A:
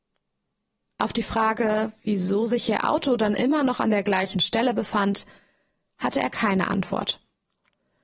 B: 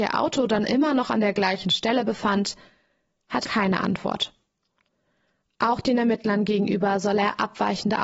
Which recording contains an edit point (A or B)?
B